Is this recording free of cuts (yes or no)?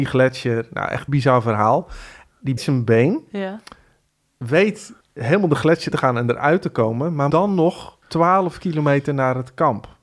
no